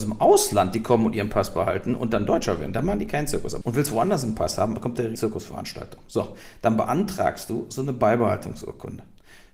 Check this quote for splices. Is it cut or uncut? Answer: cut